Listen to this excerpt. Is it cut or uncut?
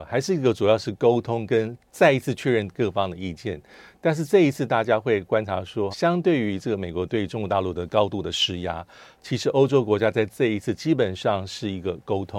cut